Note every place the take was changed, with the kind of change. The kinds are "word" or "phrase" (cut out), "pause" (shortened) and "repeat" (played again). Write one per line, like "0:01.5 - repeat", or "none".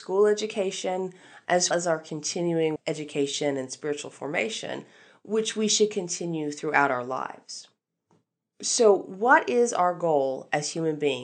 0:01.7 - word
0:02.8 - word